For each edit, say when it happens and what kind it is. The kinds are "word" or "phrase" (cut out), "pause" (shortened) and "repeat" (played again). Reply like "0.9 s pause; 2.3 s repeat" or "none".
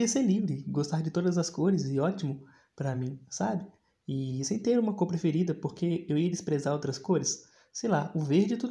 none